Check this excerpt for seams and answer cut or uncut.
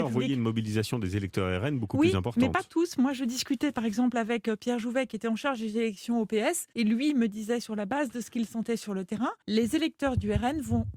cut